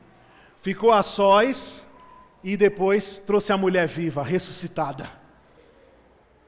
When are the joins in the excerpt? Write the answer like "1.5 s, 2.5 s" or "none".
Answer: none